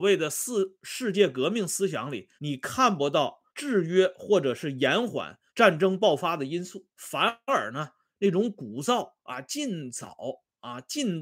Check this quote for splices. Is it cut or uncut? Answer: cut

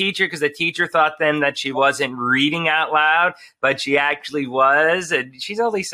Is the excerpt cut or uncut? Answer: uncut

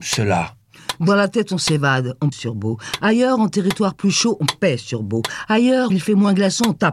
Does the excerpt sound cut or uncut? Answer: cut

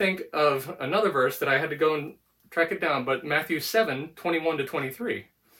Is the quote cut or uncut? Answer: uncut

